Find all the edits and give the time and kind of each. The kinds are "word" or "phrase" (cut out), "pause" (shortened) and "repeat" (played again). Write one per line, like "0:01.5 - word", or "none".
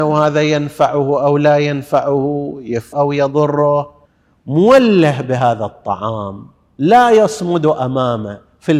0:02.9 - word
0:04.0 - pause